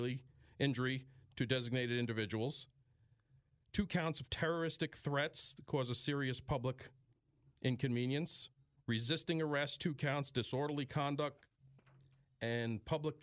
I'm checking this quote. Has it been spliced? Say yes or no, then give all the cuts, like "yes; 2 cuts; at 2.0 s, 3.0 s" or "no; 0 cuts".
no; 0 cuts